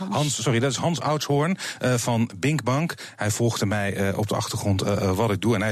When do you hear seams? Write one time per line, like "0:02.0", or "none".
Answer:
none